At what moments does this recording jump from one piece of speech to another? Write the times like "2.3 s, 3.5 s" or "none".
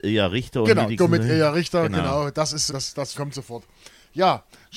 1.0 s, 2.7 s, 3.1 s